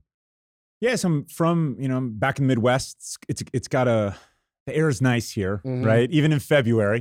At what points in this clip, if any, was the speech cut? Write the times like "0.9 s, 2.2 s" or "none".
none